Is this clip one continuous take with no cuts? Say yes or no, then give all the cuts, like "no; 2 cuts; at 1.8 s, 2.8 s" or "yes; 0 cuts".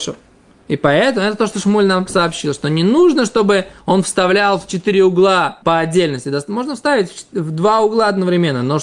no; 1 cut; at 5.6 s